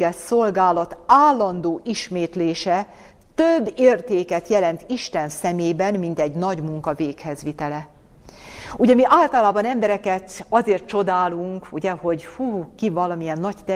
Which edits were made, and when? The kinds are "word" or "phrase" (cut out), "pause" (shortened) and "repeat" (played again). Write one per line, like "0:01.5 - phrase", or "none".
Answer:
none